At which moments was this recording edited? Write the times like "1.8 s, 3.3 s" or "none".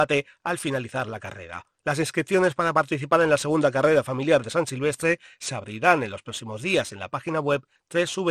1.8 s